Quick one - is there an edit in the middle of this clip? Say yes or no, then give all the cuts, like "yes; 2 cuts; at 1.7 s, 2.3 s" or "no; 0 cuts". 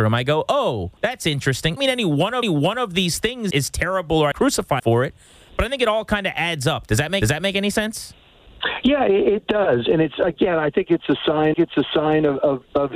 yes; 8 cuts; at 1.0 s, 1.8 s, 2.4 s, 3.5 s, 4.3 s, 4.8 s, 7.2 s, 11.5 s